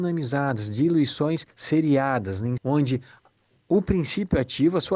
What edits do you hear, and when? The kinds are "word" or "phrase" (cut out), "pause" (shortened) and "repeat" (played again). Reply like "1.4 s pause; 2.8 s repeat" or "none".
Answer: 1.5 s pause; 2.6 s word